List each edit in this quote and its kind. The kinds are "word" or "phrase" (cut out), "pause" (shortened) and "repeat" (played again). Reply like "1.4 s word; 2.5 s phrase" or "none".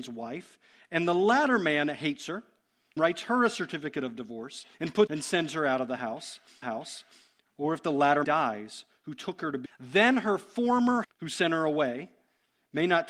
3.0 s word; 4.7 s pause; 5.1 s phrase; 6.6 s repeat; 8.2 s word; 9.7 s phrase; 11.0 s word